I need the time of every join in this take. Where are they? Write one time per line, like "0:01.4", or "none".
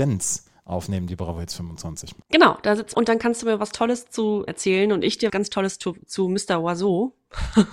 0:02.2
0:02.9
0:04.5
0:05.3